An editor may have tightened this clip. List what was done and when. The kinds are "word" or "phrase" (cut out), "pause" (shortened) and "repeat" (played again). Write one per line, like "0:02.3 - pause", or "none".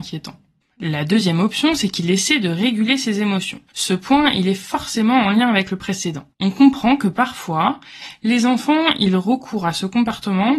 0:03.7 - pause
0:06.3 - pause